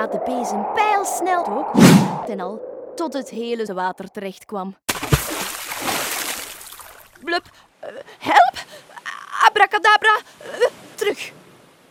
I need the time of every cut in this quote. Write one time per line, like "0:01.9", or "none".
0:01.4
0:02.3
0:03.7
0:10.9